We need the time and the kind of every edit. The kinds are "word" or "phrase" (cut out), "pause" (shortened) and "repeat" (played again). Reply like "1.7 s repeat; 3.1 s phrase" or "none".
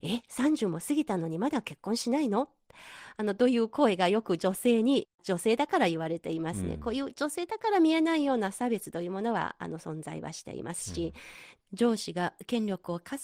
none